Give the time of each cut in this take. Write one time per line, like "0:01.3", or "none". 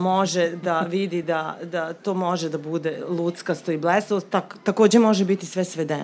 none